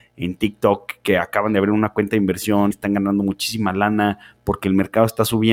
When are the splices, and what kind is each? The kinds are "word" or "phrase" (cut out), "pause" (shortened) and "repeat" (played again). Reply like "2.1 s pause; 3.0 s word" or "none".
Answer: 2.7 s word